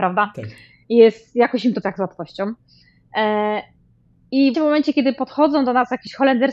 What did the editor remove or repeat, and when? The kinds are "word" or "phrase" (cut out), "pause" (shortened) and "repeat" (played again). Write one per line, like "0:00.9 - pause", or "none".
0:01.8 - word
0:04.5 - word

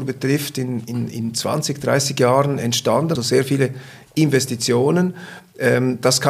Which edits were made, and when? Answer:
0:03.2 - word

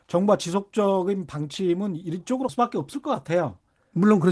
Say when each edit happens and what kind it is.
0:02.5 - word

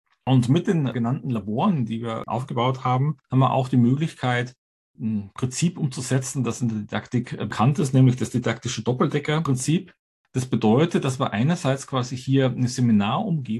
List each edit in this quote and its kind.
0:03.2 - pause

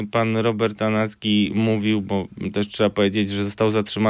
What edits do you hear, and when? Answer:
none

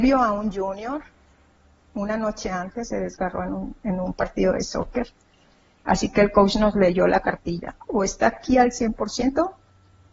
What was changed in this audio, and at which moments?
none

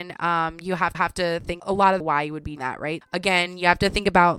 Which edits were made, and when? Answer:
0:00.9 - repeat
0:01.6 - phrase
0:02.0 - phrase
0:02.6 - word
0:03.0 - word

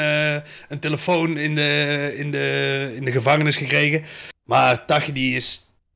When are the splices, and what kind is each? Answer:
0:04.4 - pause

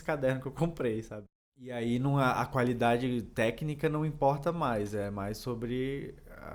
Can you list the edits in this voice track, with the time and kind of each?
none

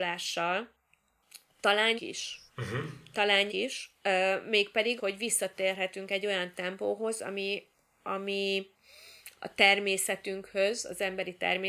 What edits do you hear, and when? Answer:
0:02.0 - word
0:02.5 - pause
0:03.5 - word
0:05.0 - word

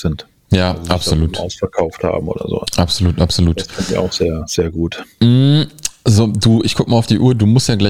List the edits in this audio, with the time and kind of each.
0:05.1 - pause

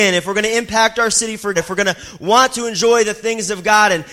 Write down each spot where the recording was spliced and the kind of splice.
0:01.5 - word

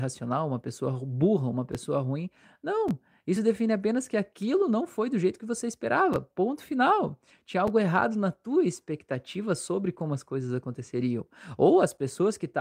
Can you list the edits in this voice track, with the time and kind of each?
none

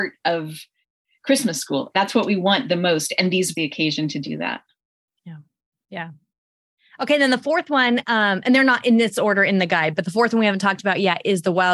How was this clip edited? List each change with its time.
0:03.5 - phrase

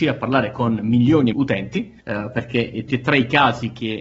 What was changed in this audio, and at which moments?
0:01.3 - phrase
0:02.0 - pause
0:02.9 - word

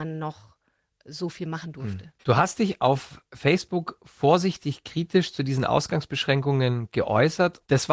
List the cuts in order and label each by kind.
0:02.2 - pause

